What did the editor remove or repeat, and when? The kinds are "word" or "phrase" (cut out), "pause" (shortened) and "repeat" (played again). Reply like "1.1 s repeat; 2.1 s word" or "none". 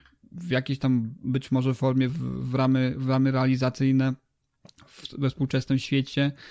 2.1 s word